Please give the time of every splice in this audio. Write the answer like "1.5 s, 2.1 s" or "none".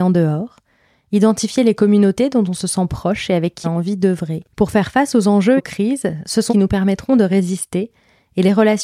3.6 s, 4.5 s, 5.6 s, 6.5 s